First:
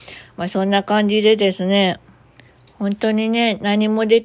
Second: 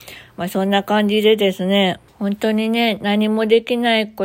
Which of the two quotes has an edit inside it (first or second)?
second